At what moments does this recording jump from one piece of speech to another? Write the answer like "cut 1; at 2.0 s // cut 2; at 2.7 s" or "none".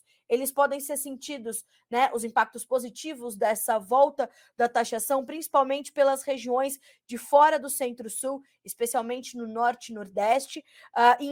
none